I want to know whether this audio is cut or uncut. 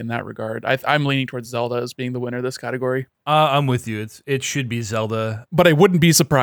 uncut